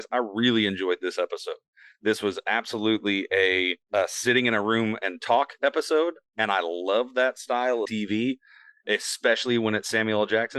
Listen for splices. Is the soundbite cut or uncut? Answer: cut